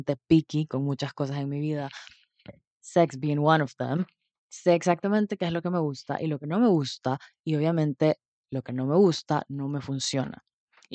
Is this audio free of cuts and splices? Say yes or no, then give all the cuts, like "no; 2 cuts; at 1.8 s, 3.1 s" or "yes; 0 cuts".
yes; 0 cuts